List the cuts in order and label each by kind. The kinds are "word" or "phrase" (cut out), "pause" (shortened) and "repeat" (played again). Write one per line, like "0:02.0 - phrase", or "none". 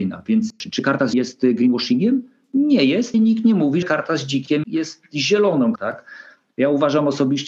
0:01.1 - word
0:03.1 - word
0:03.8 - word
0:04.6 - word
0:05.8 - word